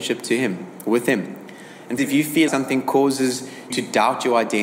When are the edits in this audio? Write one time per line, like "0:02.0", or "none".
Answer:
0:02.0
0:02.5
0:03.7